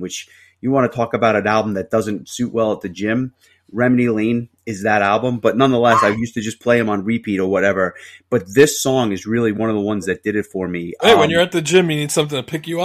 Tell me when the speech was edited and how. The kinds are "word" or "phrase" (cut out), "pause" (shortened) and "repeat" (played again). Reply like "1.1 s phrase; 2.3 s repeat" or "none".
none